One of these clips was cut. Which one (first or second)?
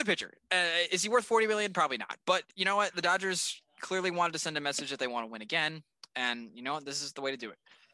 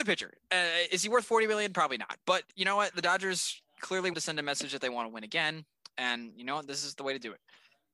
second